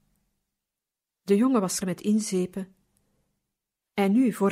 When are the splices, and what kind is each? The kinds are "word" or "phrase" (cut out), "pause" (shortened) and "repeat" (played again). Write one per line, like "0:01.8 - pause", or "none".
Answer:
0:01.8 - word